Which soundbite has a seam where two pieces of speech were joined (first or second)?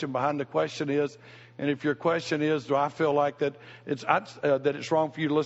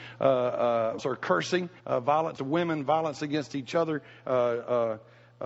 second